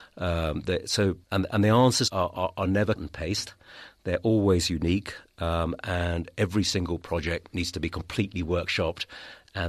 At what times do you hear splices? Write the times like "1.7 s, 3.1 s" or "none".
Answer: 1.2 s, 2.1 s, 3.0 s